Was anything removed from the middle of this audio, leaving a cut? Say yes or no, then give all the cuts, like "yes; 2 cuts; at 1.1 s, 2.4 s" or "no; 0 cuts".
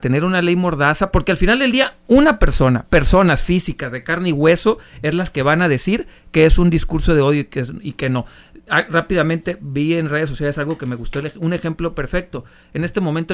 no; 0 cuts